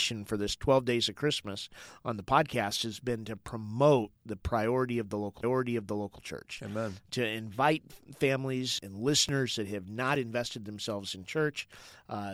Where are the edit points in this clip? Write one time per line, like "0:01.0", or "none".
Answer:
0:05.4
0:08.8